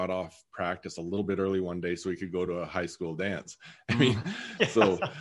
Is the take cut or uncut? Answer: uncut